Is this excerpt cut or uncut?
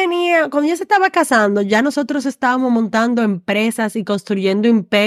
uncut